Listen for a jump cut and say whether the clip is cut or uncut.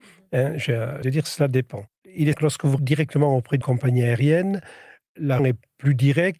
cut